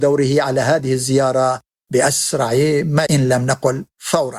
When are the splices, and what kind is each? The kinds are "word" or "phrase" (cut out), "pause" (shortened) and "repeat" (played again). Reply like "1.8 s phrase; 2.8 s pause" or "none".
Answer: 3.1 s word